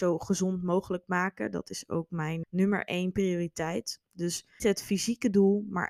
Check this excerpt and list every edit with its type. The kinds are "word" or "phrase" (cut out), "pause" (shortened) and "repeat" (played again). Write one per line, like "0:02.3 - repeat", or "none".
0:02.4 - word
0:04.6 - word